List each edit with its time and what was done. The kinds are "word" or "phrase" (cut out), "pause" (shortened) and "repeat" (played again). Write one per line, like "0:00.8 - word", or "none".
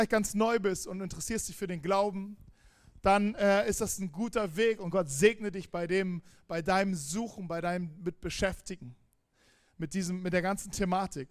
none